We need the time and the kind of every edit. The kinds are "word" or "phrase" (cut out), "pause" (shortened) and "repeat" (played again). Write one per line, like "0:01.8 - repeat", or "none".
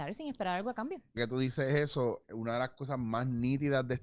0:01.2 - word
0:02.2 - word